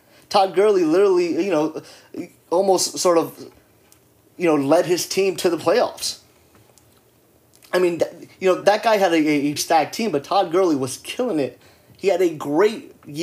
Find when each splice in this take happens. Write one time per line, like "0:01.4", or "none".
0:08.6
0:09.6